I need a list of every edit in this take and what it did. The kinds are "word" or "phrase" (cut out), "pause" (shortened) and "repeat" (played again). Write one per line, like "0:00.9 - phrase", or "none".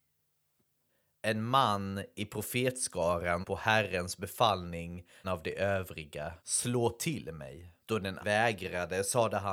0:03.4 - word
0:05.2 - phrase
0:06.4 - pause
0:07.8 - pause
0:08.2 - word